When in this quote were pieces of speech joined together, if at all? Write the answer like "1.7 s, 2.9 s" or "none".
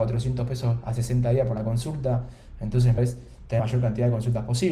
3.0 s, 3.6 s